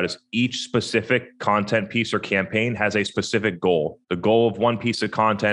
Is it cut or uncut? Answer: cut